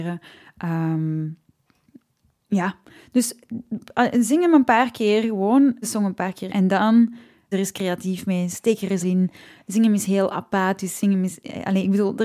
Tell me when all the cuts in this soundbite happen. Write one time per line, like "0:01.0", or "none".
0:05.8
0:06.5
0:07.5
0:09.0